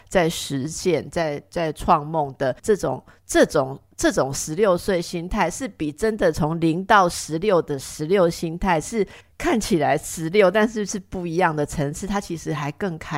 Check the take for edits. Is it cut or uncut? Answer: cut